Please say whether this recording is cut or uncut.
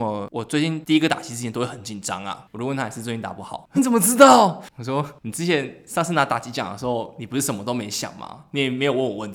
cut